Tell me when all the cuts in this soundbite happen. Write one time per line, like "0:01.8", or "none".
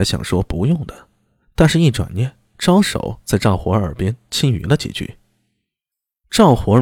none